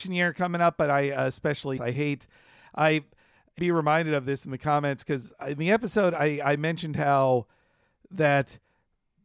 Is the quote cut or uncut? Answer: cut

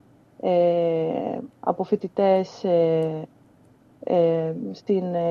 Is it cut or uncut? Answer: cut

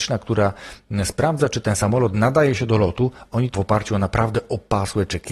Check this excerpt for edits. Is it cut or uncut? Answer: cut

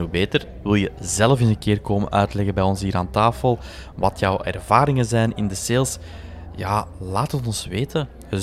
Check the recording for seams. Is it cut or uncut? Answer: uncut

